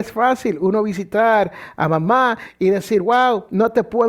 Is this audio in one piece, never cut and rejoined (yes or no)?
yes